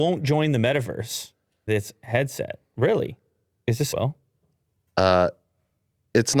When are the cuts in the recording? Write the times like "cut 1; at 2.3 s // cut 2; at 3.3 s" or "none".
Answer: cut 1; at 1.7 s // cut 2; at 3.9 s